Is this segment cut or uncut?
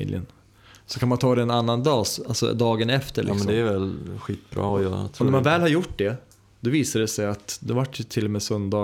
uncut